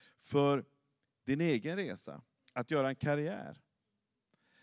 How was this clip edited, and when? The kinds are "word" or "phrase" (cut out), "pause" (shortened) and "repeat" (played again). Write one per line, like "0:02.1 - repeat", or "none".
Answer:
none